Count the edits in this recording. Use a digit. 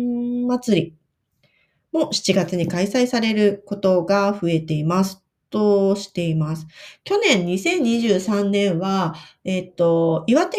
0